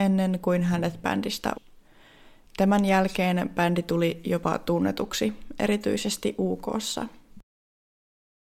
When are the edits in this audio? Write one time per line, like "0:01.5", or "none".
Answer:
0:01.0
0:01.5